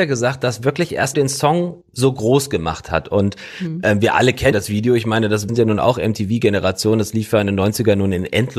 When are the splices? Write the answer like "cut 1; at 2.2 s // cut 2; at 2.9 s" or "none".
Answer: cut 1; at 1.1 s // cut 2; at 1.8 s // cut 3; at 4.5 s // cut 4; at 5.5 s